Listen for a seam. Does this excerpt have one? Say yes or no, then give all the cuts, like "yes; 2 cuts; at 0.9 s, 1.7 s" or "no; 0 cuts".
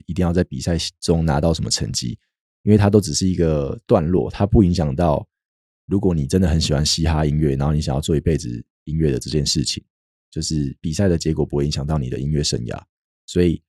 no; 0 cuts